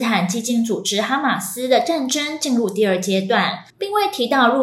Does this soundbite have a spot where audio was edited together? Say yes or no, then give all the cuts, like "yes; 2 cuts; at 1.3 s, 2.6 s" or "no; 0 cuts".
yes; 1 cut; at 3.7 s